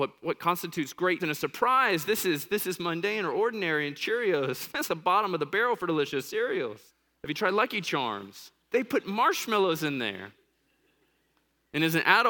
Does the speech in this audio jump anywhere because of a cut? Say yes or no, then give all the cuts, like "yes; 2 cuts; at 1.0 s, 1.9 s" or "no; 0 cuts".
yes; 3 cuts; at 1.2 s, 4.9 s, 6.9 s